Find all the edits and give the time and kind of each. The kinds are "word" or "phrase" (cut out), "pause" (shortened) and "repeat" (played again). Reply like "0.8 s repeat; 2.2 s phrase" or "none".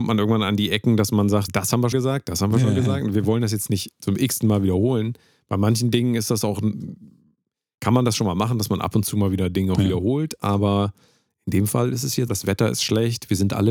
1.5 s word; 1.9 s word; 12.3 s word